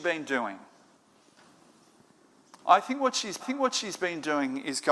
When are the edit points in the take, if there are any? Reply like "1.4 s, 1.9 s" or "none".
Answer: 3.4 s

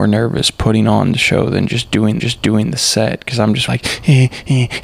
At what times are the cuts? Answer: 2.2 s, 3.7 s

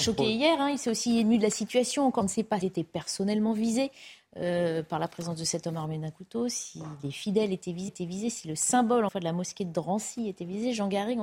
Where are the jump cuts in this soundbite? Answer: 2.2 s, 2.6 s, 7.9 s, 9.1 s

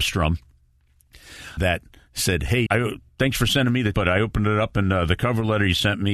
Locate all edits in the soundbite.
1.6 s, 2.7 s, 3.9 s

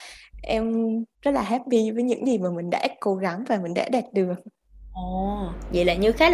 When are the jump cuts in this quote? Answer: 1.1 s

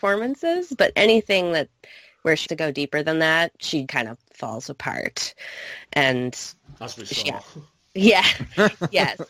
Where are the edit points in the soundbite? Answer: 2.4 s, 3.9 s

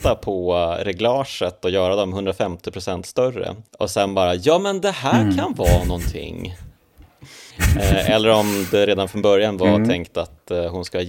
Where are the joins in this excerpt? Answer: 3.7 s, 7.5 s

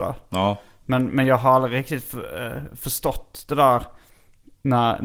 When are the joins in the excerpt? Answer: none

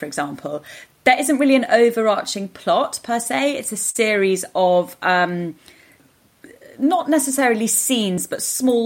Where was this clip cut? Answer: none

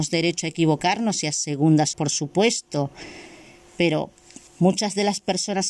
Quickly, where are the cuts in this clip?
1.9 s, 4.5 s

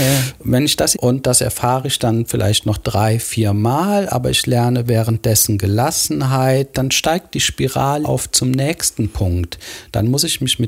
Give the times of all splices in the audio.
0.9 s, 8.0 s

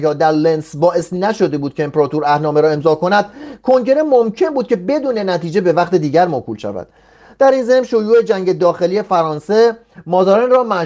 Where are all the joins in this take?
none

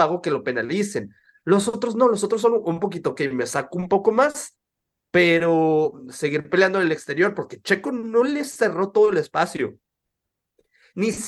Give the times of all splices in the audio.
none

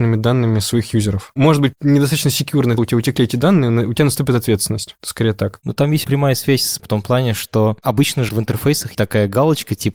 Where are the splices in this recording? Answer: 1.7 s, 2.8 s, 6.0 s, 6.8 s, 8.3 s, 8.9 s

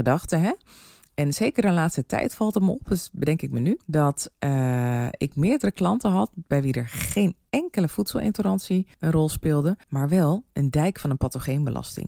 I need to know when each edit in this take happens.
3.8 s, 8.9 s, 9.8 s

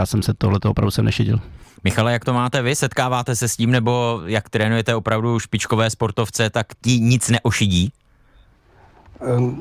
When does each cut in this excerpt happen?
6.7 s

